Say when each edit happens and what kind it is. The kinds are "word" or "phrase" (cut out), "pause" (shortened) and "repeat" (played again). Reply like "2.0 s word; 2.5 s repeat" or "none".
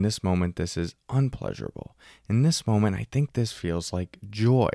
none